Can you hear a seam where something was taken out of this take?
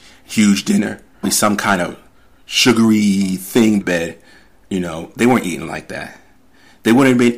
yes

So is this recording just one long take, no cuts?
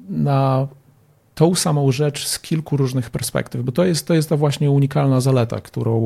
yes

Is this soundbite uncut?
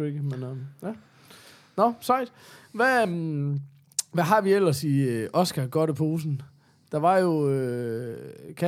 yes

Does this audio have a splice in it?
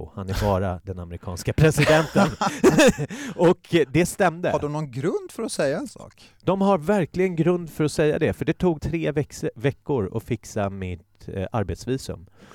yes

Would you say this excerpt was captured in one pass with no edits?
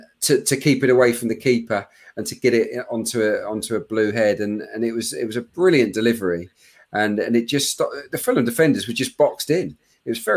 yes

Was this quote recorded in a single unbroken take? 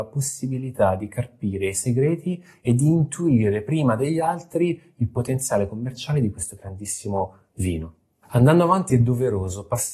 yes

